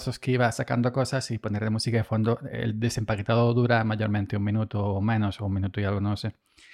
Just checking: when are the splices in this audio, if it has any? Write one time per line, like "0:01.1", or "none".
none